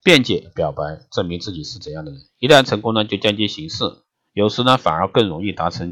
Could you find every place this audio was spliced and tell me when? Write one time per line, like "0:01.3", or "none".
none